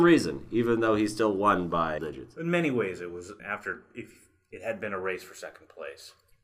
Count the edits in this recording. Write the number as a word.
two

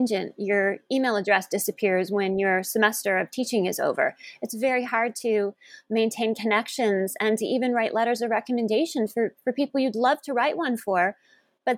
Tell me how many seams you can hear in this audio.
zero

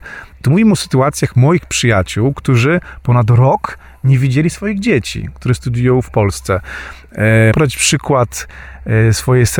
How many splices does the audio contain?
one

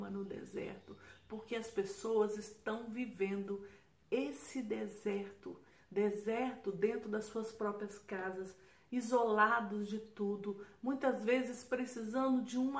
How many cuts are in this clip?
zero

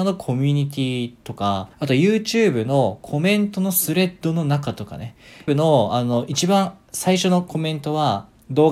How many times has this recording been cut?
two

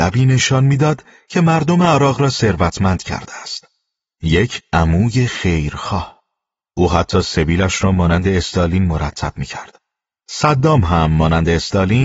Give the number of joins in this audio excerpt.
zero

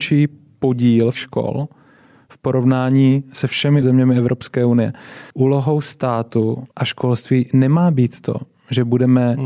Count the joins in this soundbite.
four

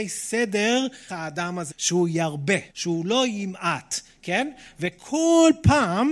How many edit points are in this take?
three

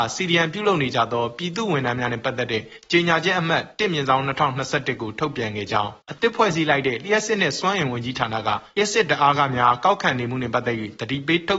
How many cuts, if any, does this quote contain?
one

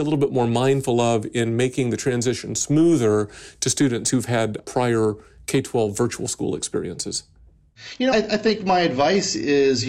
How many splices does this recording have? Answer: two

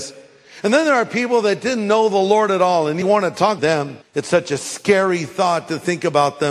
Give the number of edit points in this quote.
three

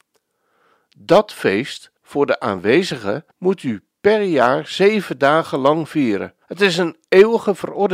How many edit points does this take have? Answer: three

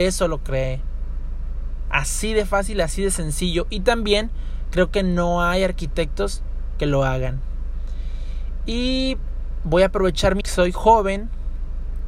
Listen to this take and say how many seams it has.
one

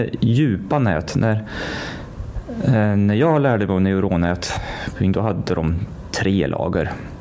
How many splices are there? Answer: one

